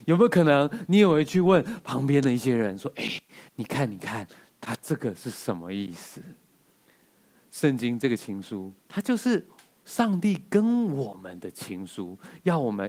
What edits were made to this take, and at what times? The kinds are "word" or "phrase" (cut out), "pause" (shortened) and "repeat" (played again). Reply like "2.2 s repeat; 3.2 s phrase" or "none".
8.8 s pause